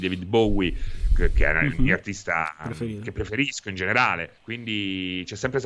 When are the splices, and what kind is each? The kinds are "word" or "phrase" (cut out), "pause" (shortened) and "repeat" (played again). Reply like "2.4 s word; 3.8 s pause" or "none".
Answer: 4.4 s pause